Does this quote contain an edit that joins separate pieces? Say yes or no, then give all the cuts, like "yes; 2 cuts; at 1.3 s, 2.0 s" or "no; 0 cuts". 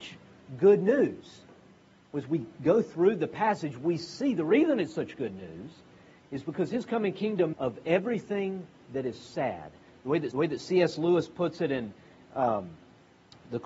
yes; 2 cuts; at 7.5 s, 10.3 s